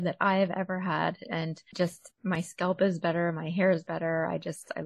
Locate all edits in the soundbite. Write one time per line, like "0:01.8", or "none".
none